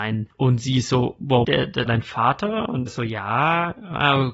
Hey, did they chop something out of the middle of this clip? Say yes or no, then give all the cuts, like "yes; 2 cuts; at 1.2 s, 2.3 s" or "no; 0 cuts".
yes; 3 cuts; at 1.4 s, 1.9 s, 2.9 s